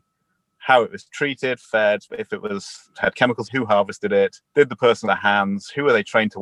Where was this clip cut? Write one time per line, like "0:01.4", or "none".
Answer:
0:02.1
0:03.4
0:04.4
0:05.0